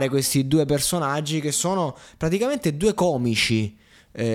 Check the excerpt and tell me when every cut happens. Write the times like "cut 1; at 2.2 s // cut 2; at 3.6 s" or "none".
none